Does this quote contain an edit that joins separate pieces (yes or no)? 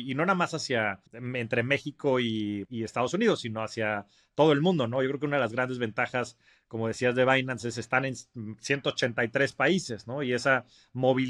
yes